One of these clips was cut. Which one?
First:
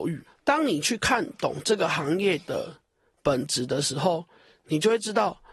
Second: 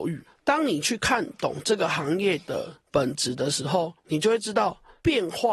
second; 2 cuts; at 2.9 s, 4.0 s

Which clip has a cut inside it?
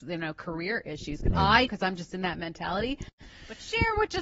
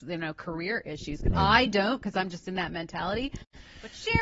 first; 1 cut; at 1.7 s

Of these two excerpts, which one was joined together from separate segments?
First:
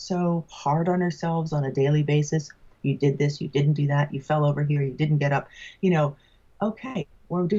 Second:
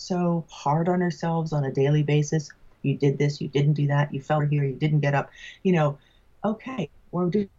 second; 1 cut; at 4.4 s

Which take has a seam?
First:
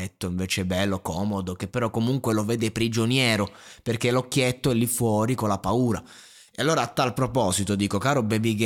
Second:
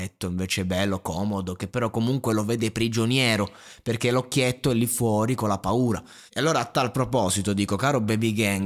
second; 1 cut; at 6.3 s

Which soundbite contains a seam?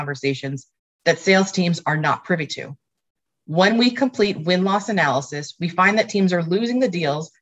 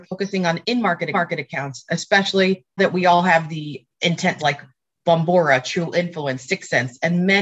second; 3 cuts; at 1.1 s, 2.8 s, 4.4 s

